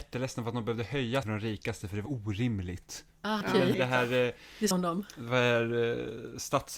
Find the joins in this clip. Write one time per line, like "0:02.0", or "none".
0:01.2
0:02.1
0:03.4
0:03.7
0:04.7